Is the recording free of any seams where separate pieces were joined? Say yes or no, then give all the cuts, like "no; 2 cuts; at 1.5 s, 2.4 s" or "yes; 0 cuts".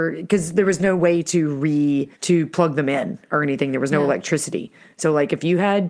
no; 1 cut; at 2.1 s